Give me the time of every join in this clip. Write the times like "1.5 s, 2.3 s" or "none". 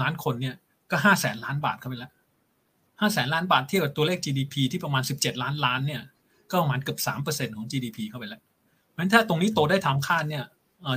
none